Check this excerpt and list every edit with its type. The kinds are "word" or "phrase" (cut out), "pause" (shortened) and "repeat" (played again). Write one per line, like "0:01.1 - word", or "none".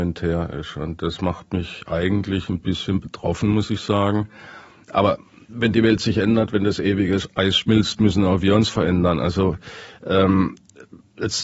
none